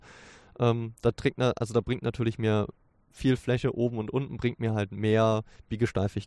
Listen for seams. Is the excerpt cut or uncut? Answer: uncut